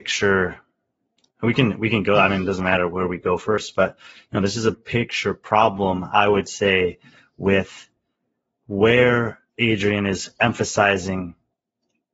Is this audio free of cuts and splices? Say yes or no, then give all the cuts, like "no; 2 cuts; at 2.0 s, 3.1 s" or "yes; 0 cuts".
no; 2 cuts; at 4.7 s, 9.5 s